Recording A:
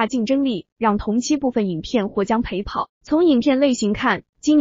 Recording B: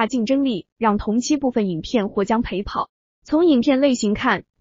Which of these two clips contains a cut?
A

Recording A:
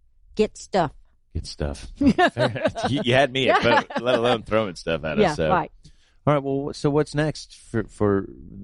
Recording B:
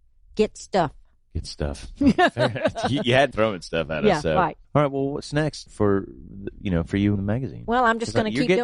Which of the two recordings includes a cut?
B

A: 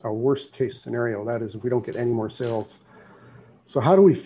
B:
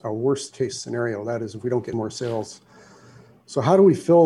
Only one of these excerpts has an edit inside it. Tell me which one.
B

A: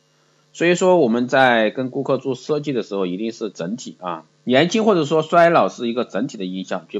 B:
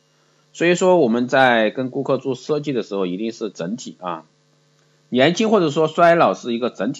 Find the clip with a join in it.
A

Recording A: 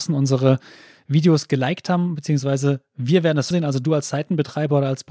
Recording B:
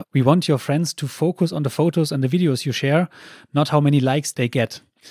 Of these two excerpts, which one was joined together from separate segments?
A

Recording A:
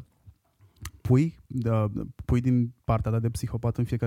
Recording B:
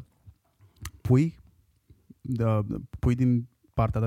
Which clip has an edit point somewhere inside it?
A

